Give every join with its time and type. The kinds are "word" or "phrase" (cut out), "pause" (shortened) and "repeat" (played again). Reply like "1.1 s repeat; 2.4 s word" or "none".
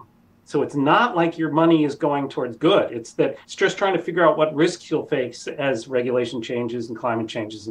3.4 s pause